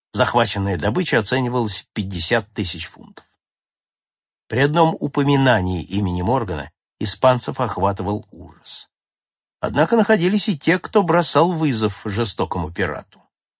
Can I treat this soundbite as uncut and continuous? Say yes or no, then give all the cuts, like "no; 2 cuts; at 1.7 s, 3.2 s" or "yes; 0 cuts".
yes; 0 cuts